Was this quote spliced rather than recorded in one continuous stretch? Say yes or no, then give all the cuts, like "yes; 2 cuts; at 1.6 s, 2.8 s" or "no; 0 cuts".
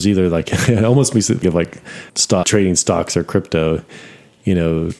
yes; 3 cuts; at 1.4 s, 2.1 s, 2.4 s